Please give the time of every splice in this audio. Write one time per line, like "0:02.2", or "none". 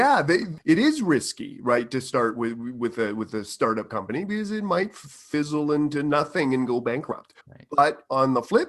0:07.4